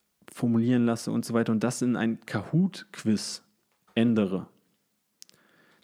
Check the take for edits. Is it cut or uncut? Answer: uncut